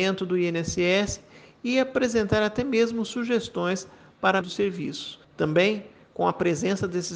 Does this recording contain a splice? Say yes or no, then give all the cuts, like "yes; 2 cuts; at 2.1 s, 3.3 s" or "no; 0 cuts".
yes; 2 cuts; at 4.4 s, 5.2 s